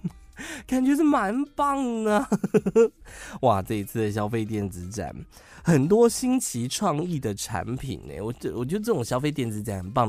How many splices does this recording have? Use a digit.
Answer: 0